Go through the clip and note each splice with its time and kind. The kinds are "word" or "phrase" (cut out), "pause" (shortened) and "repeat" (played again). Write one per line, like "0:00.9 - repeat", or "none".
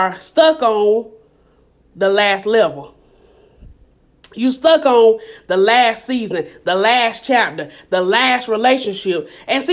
none